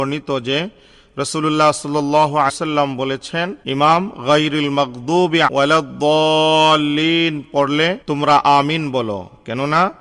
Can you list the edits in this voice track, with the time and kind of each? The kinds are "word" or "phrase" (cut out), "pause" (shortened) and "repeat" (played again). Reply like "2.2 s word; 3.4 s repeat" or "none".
2.5 s word; 3.6 s pause; 5.5 s word; 8.0 s pause

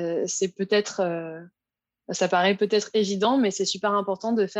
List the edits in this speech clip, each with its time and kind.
none

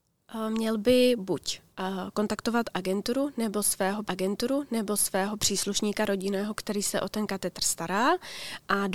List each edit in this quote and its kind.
4.0 s repeat

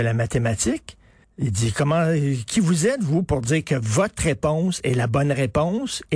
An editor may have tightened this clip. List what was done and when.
1.2 s pause

